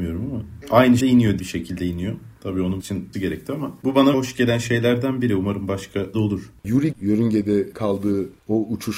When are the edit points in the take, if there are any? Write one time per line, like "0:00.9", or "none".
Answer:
0:01.0
0:01.4
0:02.8
0:03.1
0:04.1
0:06.1
0:06.9